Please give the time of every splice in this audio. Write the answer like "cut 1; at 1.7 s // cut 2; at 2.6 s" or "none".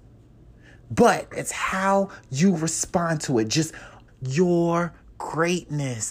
cut 1; at 1.3 s // cut 2; at 4.1 s